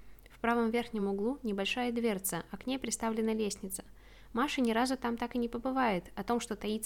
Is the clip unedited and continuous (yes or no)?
yes